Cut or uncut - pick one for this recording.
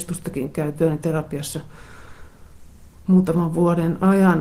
uncut